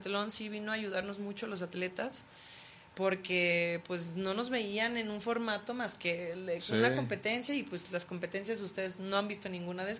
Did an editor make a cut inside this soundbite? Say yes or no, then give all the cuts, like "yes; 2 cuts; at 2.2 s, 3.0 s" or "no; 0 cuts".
no; 0 cuts